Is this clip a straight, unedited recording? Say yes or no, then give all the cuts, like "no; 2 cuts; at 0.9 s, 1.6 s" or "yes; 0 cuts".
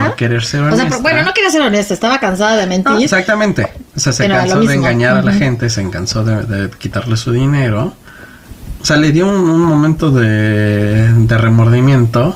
yes; 0 cuts